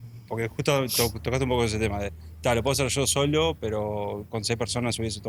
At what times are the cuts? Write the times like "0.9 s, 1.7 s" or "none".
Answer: none